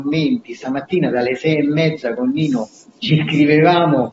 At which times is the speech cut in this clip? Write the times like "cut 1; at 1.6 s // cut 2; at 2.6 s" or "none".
none

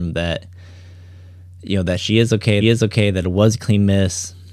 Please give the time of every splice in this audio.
cut 1; at 2.6 s

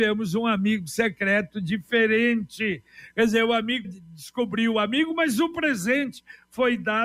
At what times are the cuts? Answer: cut 1; at 3.8 s

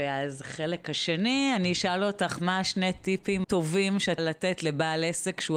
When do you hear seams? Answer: cut 1; at 3.4 s // cut 2; at 4.2 s

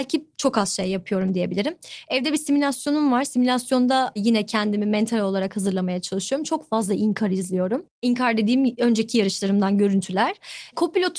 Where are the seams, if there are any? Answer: none

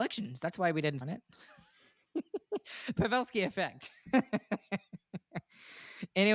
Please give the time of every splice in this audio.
cut 1; at 1.0 s // cut 2; at 3.0 s

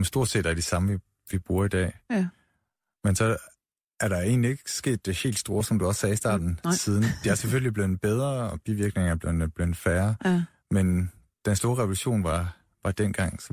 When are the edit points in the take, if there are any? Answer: none

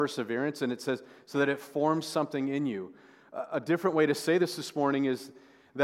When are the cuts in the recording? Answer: none

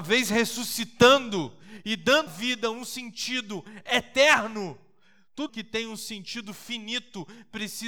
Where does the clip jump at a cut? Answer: cut 1; at 2.3 s // cut 2; at 5.5 s

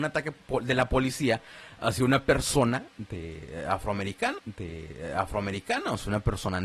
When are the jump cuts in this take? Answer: cut 1; at 4.4 s

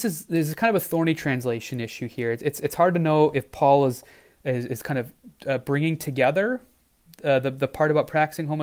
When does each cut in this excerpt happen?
none

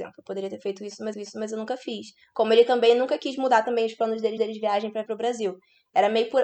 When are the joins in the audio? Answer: cut 1; at 1.1 s // cut 2; at 4.4 s // cut 3; at 5.1 s

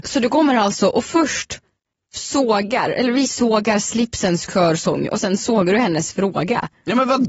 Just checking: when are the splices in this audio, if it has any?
none

